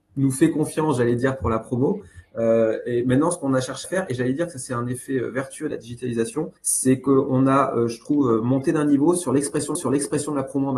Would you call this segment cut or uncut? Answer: cut